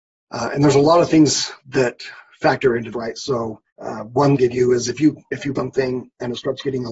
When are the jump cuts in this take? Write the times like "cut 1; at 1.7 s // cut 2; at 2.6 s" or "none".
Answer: cut 1; at 1.6 s // cut 2; at 2.9 s // cut 3; at 3.7 s // cut 4; at 4.4 s // cut 5; at 5.6 s